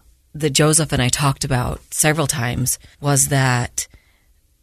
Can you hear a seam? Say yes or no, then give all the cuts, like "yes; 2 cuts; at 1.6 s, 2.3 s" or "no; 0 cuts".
yes; 1 cut; at 2.9 s